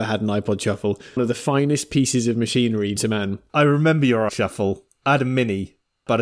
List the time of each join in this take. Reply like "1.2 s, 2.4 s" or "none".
1.2 s, 3.0 s, 4.3 s